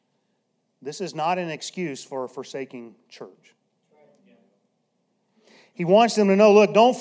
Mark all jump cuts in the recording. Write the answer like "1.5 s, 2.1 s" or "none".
none